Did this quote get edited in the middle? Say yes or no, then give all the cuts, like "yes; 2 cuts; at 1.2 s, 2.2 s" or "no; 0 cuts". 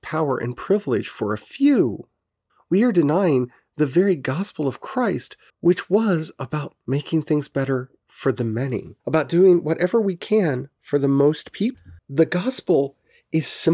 yes; 5 cuts; at 2.5 s, 5.5 s, 6.8 s, 9.0 s, 12.0 s